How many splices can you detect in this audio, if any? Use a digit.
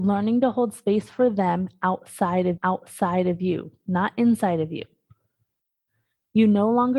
1